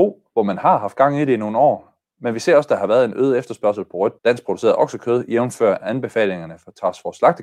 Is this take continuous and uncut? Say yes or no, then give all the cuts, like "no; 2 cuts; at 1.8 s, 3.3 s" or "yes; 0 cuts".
no; 1 cut; at 4.2 s